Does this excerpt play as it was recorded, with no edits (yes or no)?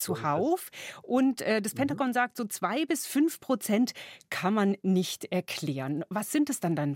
yes